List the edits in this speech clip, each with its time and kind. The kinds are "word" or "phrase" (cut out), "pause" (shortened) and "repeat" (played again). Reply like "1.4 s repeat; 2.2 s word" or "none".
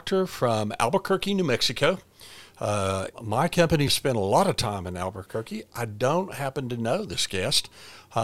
3.1 s pause; 3.9 s word